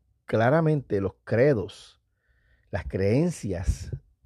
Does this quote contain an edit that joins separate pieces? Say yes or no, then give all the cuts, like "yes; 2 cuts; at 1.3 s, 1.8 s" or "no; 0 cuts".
no; 0 cuts